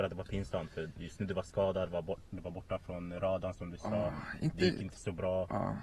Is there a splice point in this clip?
no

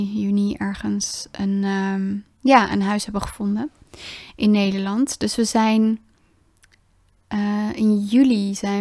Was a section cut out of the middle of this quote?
yes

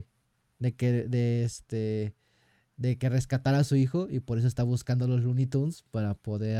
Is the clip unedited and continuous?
yes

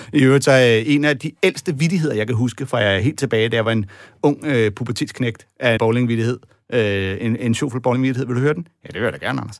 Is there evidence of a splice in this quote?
yes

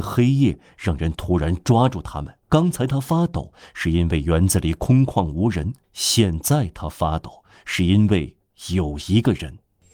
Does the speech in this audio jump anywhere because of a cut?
yes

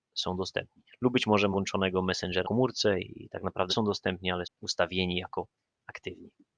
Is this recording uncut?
no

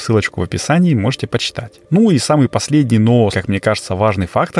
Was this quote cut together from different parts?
yes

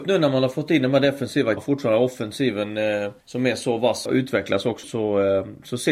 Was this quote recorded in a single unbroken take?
no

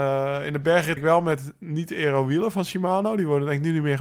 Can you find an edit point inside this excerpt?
yes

